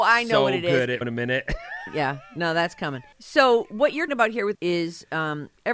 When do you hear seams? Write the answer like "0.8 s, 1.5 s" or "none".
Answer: 1.0 s, 3.1 s, 4.1 s, 4.5 s